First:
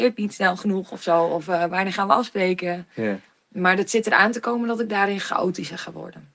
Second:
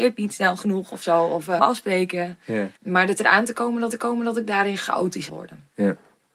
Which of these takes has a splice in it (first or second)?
second